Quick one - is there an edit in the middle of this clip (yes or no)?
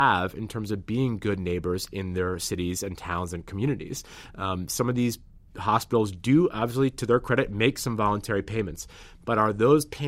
yes